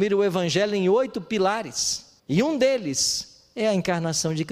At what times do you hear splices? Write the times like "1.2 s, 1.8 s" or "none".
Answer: 2.2 s